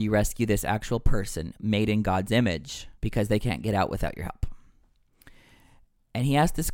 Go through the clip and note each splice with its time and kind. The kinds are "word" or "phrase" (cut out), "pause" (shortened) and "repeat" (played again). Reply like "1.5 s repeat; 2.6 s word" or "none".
3.0 s pause